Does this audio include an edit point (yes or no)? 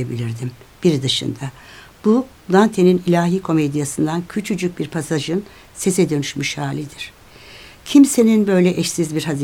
no